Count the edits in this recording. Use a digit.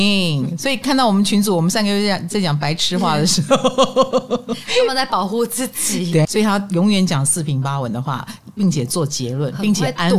1